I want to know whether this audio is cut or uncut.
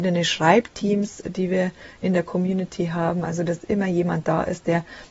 uncut